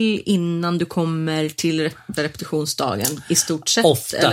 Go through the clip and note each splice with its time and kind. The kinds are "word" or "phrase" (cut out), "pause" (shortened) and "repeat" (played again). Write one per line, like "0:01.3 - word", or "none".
0:02.2 - word